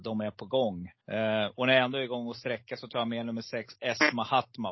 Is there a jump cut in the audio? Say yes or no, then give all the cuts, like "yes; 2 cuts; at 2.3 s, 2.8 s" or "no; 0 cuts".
yes; 1 cut; at 1.0 s